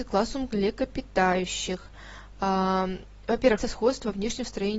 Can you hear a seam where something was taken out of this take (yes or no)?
yes